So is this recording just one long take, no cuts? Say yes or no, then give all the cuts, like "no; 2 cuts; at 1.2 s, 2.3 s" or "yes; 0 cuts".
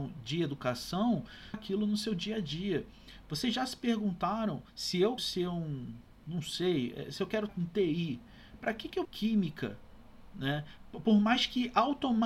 no; 6 cuts; at 1.5 s, 4.7 s, 5.2 s, 6.2 s, 7.5 s, 9.0 s